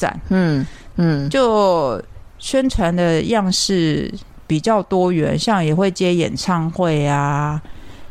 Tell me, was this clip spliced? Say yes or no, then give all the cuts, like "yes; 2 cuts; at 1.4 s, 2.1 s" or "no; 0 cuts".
yes; 1 cut; at 0.9 s